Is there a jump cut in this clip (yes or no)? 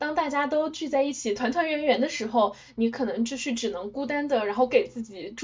no